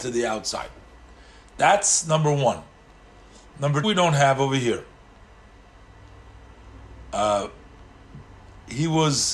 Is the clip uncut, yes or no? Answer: no